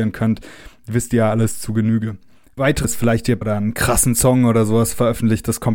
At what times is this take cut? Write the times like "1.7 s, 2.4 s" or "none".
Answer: 2.8 s, 3.4 s